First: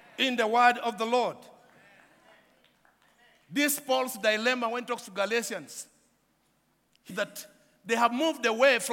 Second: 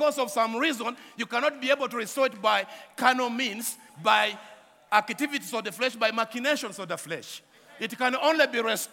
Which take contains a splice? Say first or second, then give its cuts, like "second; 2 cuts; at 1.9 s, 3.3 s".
first; 1 cut; at 7.1 s